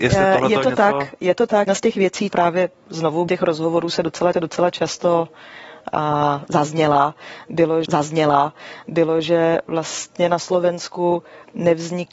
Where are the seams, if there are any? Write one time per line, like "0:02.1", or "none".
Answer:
0:01.7
0:02.3
0:03.3
0:04.3
0:07.9